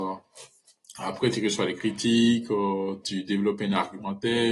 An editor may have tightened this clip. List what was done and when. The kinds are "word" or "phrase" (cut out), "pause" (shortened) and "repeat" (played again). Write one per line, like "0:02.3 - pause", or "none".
none